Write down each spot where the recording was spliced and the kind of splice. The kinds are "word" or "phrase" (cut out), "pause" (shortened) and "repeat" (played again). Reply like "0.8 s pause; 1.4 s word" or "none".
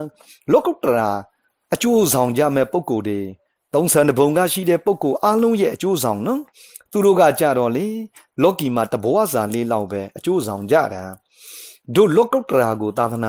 none